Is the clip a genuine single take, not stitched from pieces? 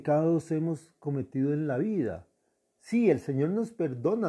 yes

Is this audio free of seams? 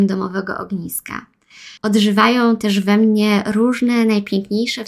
no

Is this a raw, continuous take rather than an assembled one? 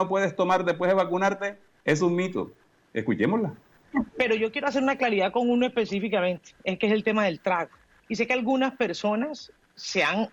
yes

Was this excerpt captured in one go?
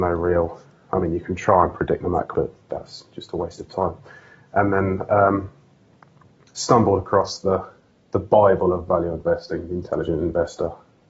no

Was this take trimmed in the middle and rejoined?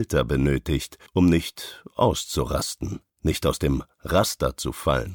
yes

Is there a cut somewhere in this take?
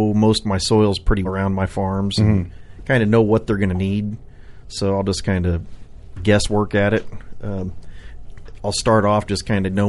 yes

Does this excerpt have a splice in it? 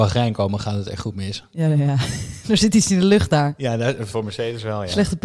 no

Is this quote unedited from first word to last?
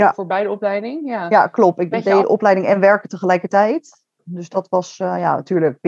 no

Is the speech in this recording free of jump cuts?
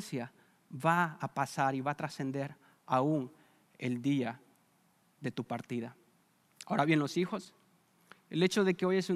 yes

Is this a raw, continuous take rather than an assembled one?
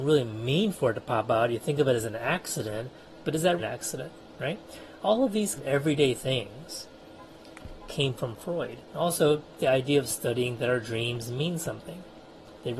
no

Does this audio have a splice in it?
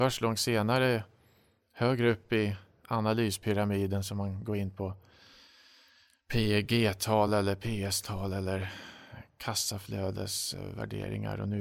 no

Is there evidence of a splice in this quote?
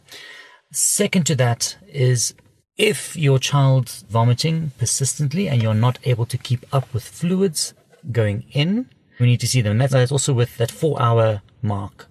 yes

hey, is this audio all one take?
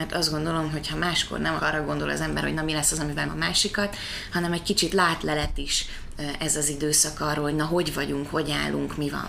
no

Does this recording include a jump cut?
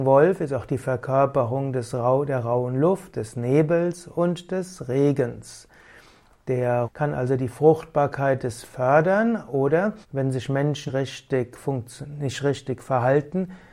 yes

